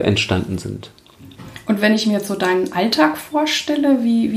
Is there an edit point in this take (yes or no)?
no